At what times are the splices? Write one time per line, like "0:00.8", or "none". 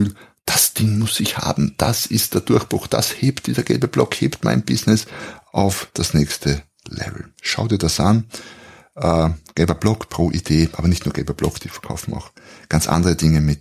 none